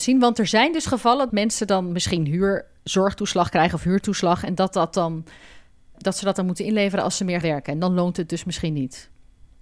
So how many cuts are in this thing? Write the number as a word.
three